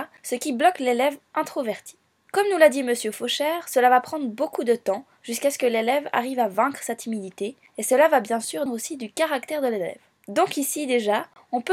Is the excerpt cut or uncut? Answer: cut